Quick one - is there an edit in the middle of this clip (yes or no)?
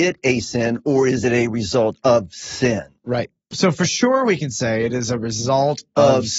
no